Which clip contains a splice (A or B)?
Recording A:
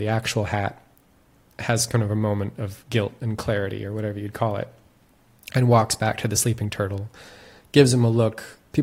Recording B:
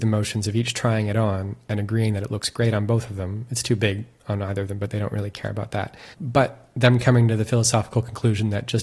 B